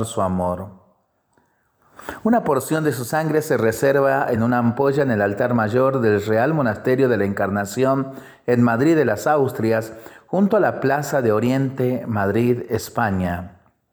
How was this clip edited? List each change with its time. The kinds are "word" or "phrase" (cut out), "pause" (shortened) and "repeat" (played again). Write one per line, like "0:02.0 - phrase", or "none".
none